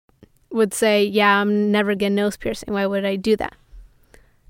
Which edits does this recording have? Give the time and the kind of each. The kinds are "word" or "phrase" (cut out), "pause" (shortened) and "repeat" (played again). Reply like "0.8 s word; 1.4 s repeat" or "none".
2.0 s word